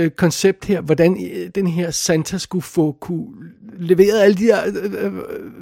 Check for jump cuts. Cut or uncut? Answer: uncut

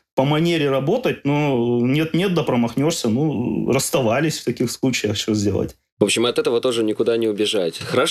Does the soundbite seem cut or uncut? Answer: uncut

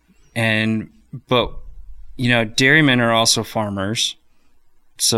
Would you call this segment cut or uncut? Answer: uncut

